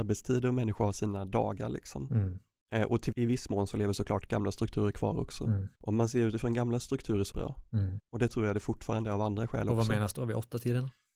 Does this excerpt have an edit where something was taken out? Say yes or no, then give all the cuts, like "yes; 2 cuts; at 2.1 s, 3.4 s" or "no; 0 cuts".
yes; 4 cuts; at 3.1 s, 5.8 s, 7.3 s, 8.0 s